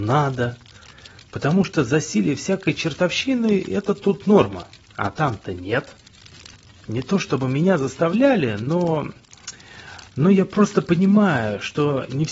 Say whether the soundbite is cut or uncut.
uncut